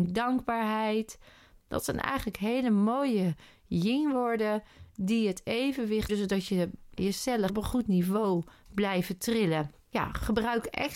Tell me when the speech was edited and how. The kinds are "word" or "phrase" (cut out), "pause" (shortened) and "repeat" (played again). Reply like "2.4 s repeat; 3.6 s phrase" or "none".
6.1 s word; 7.0 s word; 7.5 s word